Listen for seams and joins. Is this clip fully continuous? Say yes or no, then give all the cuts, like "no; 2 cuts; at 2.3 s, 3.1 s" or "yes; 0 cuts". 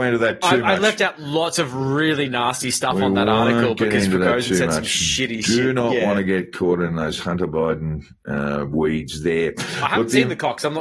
yes; 0 cuts